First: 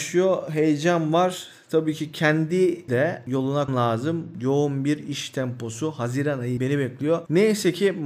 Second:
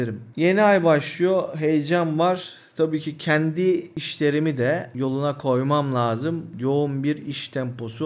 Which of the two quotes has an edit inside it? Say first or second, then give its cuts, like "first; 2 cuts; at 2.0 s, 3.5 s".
first; 3 cuts; at 2.9 s, 3.7 s, 6.6 s